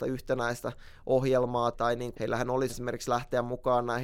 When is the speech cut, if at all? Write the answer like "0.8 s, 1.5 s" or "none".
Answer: 1.7 s, 2.1 s, 2.7 s